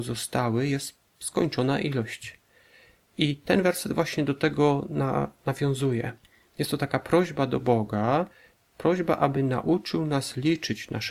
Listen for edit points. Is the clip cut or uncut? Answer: uncut